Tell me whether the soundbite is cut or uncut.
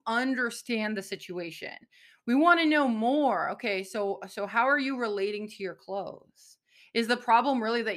uncut